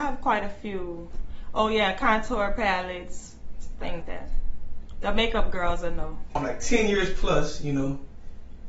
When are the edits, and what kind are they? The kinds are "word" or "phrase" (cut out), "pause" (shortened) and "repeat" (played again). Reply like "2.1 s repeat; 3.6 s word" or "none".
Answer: 4.0 s word